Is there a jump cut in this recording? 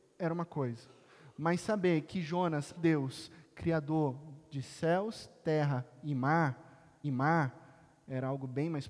yes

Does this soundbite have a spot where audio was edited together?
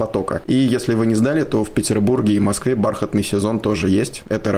no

